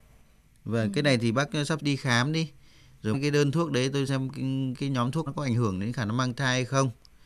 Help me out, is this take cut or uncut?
cut